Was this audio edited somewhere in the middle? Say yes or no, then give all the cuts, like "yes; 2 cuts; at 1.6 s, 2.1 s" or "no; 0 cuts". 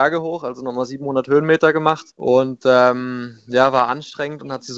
yes; 1 cut; at 2.1 s